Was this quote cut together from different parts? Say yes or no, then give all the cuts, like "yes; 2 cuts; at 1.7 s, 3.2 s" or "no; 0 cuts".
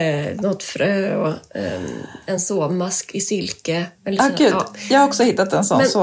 no; 0 cuts